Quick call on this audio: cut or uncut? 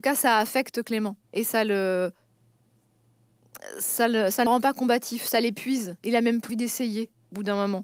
cut